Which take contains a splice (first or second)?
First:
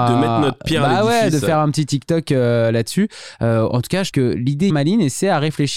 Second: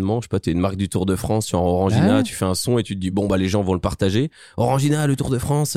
first